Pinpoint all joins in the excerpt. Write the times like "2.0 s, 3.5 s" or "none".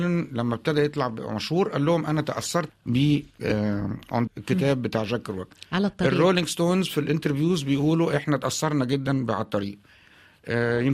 2.7 s, 3.3 s, 4.3 s